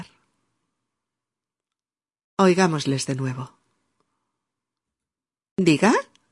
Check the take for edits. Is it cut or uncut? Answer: uncut